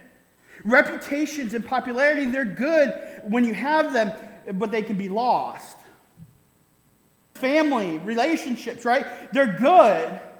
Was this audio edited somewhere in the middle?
yes; 1 cut; at 7.4 s

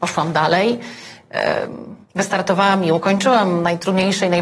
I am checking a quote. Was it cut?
yes; 1 cut; at 2.0 s

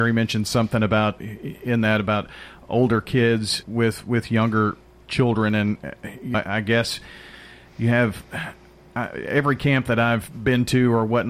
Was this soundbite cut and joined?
yes; 3 cuts; at 1.2 s, 3.6 s, 6.3 s

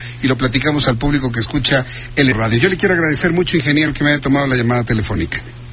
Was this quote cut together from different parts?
yes; 1 cut; at 2.3 s

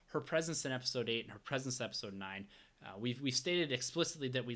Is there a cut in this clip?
no; 0 cuts

